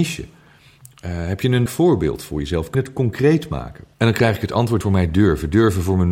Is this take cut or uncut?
cut